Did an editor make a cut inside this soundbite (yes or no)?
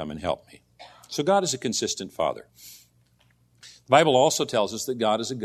yes